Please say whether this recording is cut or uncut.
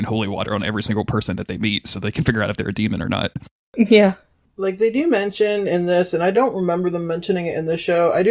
uncut